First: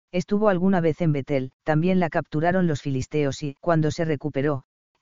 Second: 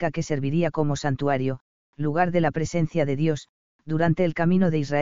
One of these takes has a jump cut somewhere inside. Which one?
first; 2 cuts; at 1.6 s, 3.6 s

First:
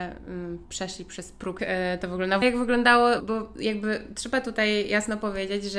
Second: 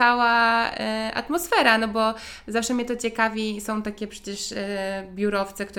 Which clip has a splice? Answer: first; 3 cuts; at 1.6 s, 2.4 s, 3.2 s

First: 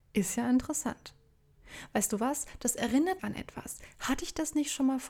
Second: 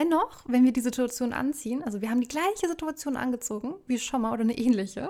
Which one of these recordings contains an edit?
first; 1 cut; at 3.2 s

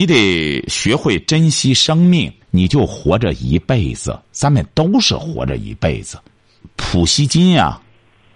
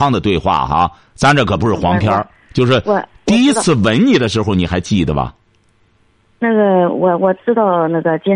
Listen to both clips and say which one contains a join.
first; 2 cuts; at 2.4 s, 6.4 s

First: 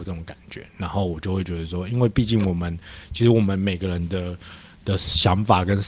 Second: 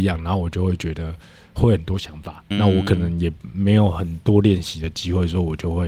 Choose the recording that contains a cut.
second; 1 cut; at 2.5 s

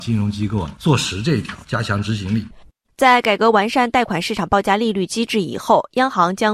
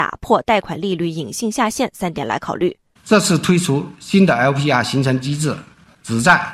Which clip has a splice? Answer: second; 1 cut; at 3.0 s

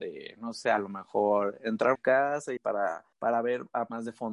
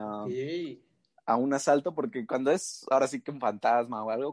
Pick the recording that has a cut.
first; 3 cuts; at 1.9 s, 2.6 s, 3.1 s

